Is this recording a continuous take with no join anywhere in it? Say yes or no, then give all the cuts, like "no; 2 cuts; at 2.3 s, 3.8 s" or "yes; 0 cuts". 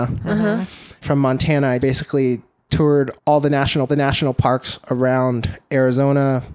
no; 4 cuts; at 1.0 s, 1.8 s, 3.2 s, 3.9 s